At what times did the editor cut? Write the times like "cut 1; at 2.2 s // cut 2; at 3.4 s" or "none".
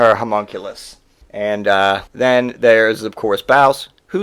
cut 1; at 1.2 s // cut 2; at 2.1 s